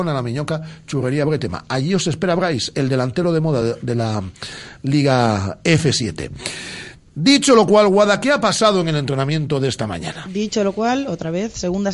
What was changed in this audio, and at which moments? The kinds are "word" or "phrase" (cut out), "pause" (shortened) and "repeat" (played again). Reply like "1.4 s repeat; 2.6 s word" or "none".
none